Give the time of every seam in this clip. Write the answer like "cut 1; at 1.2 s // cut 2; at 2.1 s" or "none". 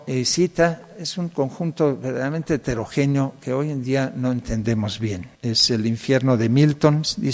cut 1; at 5.3 s

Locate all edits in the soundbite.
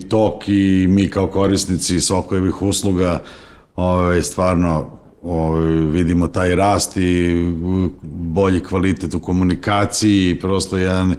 none

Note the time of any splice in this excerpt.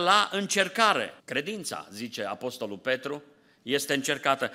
cut 1; at 1.2 s

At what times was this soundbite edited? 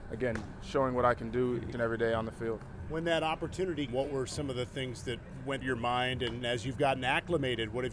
cut 1; at 1.7 s // cut 2; at 3.9 s // cut 3; at 5.6 s // cut 4; at 6.4 s

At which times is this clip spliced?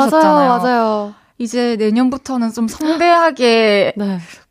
none

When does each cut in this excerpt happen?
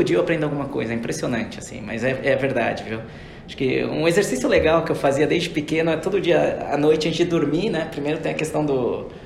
none

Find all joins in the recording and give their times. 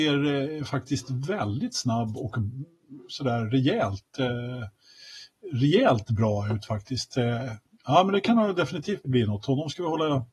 cut 1; at 9.0 s

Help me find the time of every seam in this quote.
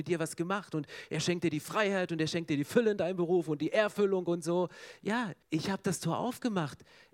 cut 1; at 5.4 s

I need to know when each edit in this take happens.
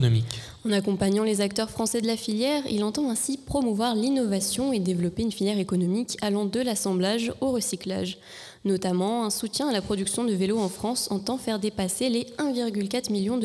none

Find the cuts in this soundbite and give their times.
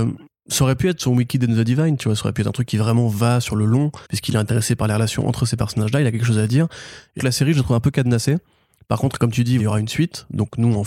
cut 1; at 4.0 s // cut 2; at 7.2 s // cut 3; at 9.6 s

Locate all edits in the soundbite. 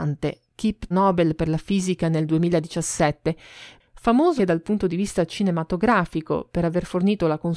cut 1; at 0.9 s // cut 2; at 4.4 s

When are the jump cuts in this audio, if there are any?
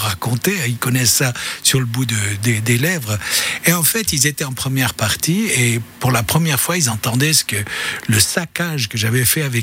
none

